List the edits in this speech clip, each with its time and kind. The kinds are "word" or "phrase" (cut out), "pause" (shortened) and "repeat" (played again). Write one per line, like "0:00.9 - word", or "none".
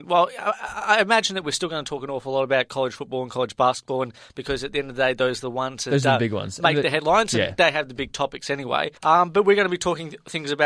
0:09.0 - pause